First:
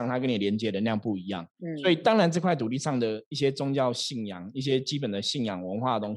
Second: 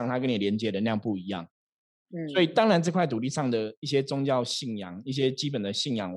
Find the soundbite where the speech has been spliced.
first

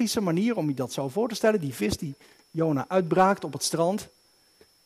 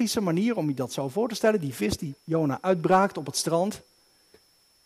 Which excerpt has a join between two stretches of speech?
second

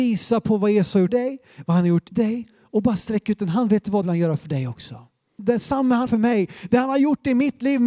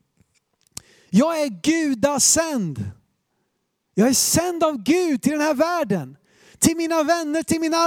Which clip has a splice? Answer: first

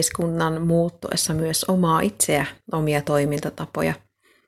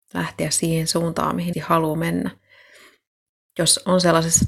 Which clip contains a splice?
second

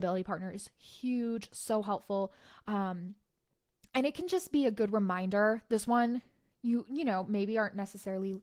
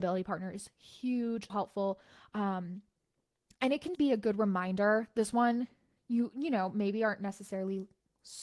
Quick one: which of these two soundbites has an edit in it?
second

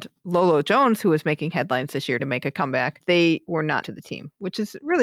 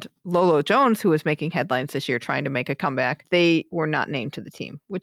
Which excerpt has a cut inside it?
first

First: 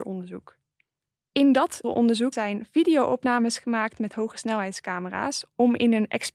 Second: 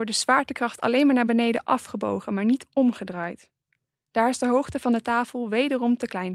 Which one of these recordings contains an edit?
first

